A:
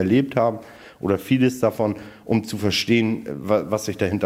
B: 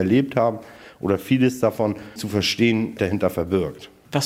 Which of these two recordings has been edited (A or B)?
B